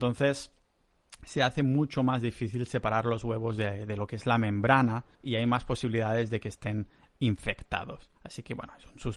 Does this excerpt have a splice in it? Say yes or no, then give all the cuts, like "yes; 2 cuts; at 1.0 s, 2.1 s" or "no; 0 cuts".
yes; 2 cuts; at 5.1 s, 8.2 s